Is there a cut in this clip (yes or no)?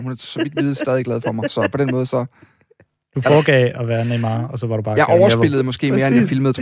no